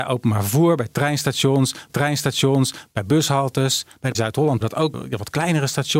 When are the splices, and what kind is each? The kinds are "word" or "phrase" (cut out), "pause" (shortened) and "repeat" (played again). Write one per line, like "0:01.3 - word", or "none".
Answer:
0:01.9 - repeat
0:04.1 - word
0:04.6 - phrase
0:04.9 - word